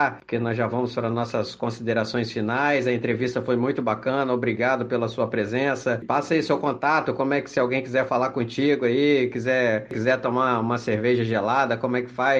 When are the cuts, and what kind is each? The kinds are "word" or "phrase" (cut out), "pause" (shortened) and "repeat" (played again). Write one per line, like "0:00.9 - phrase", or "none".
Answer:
none